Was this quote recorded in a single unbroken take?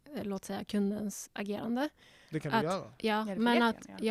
no; 1 cut; at 1.3 s

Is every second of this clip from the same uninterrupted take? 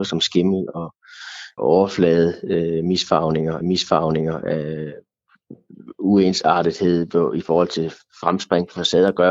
no; 2 cuts; at 1.6 s, 3.6 s

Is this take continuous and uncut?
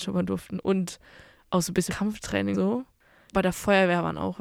no; 3 cuts; at 1.9 s, 2.5 s, 3.3 s

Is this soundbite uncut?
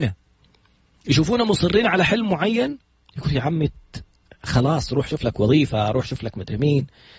yes; 0 cuts

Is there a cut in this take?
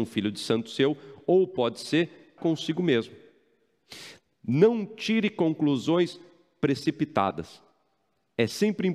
yes; 1 cut; at 2.4 s

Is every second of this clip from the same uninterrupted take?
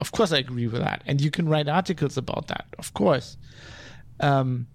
yes; 0 cuts

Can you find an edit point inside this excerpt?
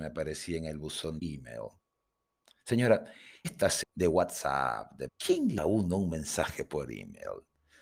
yes; 5 cuts; at 1.2 s, 3.4 s, 3.8 s, 5.1 s, 5.6 s

